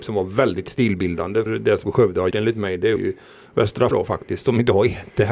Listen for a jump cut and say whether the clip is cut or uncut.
cut